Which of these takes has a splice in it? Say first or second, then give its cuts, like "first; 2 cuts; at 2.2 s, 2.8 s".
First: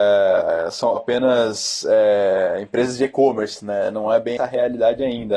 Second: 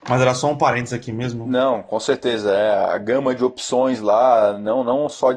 first; 2 cuts; at 1.0 s, 4.4 s